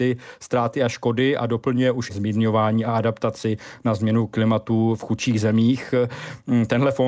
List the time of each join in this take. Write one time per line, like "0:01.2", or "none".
0:02.1